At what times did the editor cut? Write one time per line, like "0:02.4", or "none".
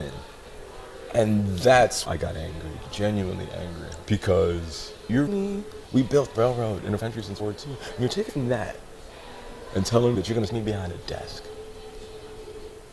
0:02.0
0:02.8
0:05.3
0:06.3
0:07.0
0:07.4
0:08.3
0:10.1
0:10.5